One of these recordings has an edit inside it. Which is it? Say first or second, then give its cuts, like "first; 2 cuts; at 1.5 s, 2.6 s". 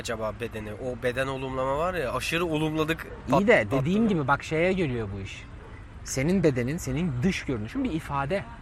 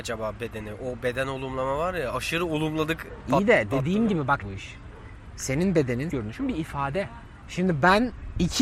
second; 2 cuts; at 4.4 s, 6.1 s